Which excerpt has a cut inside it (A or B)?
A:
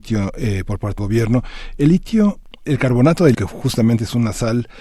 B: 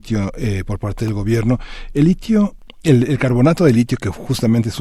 A